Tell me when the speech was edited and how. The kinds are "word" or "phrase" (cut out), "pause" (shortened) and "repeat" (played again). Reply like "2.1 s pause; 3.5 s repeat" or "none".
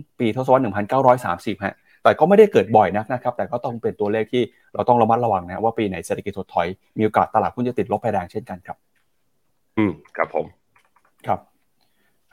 none